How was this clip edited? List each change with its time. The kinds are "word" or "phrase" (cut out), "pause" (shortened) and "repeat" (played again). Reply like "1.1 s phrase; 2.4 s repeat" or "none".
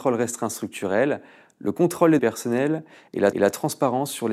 2.2 s word; 3.3 s repeat